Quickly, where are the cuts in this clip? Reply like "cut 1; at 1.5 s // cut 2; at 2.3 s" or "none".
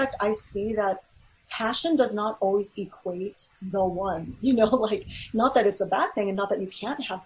none